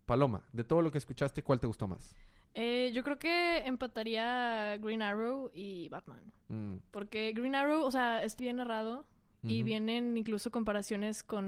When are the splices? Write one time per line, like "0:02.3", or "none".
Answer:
0:08.4